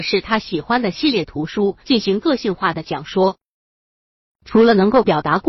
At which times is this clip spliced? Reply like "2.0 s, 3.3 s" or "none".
1.8 s